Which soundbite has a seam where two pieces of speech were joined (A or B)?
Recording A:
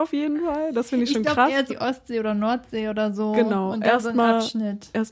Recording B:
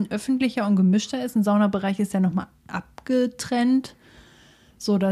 A